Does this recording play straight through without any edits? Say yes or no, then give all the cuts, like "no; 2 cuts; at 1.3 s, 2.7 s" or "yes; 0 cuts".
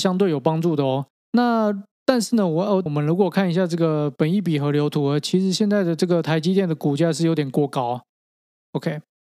no; 2 cuts; at 1.1 s, 2.9 s